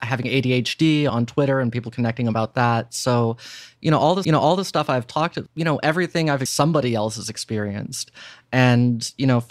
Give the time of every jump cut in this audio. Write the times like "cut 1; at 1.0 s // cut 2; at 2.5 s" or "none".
cut 1; at 1.1 s // cut 2; at 4.2 s // cut 3; at 5.5 s // cut 4; at 6.5 s